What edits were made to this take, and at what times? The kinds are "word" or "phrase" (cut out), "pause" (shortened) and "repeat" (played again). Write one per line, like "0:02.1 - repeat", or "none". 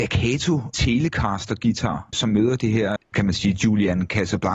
0:02.1 - word
0:03.0 - word

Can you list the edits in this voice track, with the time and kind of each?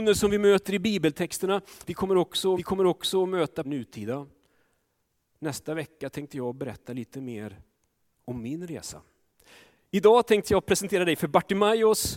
0:02.6 - repeat
0:03.6 - phrase

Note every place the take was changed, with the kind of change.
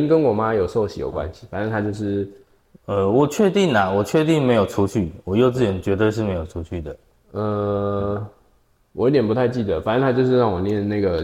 none

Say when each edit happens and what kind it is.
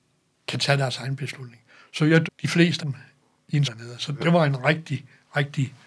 0:02.2 - word
0:02.8 - word
0:03.6 - word

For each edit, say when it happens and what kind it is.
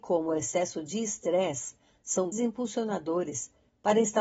0:02.3 - word

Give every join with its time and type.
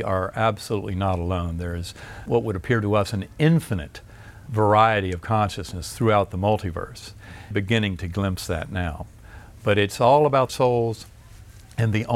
0:02.3 - word
0:04.5 - word
0:07.5 - phrase
0:10.5 - phrase

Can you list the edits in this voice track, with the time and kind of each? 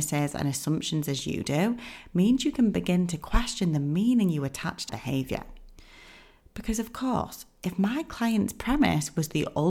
0:04.9 - word

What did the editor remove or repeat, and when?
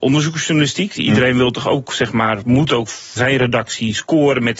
0:03.2 - word

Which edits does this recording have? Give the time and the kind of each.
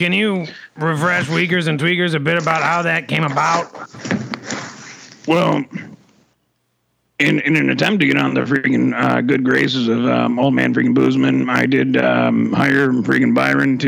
none

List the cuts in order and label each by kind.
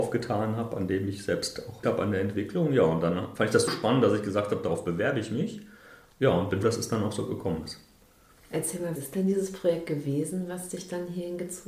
0:01.8 - word
0:03.7 - word
0:06.6 - word
0:09.0 - word

